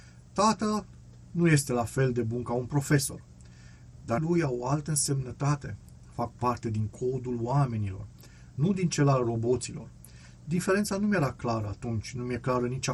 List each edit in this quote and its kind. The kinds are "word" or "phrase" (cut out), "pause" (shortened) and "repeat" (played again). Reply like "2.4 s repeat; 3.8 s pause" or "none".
4.2 s word